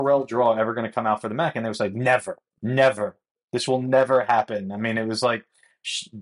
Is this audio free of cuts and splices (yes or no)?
yes